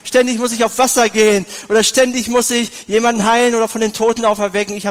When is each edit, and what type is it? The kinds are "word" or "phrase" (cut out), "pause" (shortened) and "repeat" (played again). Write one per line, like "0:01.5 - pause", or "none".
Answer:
none